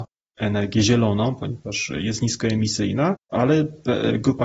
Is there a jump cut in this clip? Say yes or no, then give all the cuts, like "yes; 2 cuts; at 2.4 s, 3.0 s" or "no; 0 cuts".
yes; 1 cut; at 3.2 s